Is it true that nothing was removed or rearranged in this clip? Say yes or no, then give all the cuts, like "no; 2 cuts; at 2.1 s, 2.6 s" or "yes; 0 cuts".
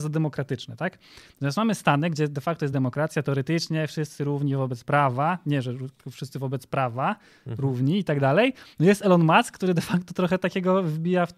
yes; 0 cuts